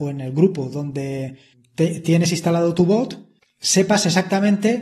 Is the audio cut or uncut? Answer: uncut